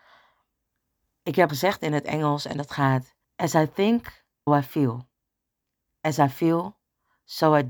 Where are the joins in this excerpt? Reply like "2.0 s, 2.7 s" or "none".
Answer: 1.5 s, 3.2 s, 4.5 s